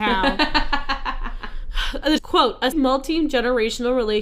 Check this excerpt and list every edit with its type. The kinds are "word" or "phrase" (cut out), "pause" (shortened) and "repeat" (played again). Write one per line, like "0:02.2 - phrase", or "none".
0:02.2 - phrase
0:02.7 - word